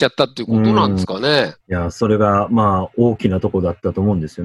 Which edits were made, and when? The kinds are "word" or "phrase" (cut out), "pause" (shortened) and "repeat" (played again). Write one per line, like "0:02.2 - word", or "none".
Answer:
0:01.6 - pause